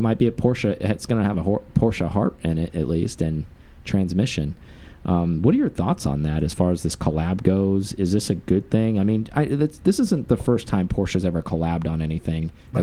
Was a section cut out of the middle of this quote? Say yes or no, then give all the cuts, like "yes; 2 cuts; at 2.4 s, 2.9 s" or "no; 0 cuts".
no; 0 cuts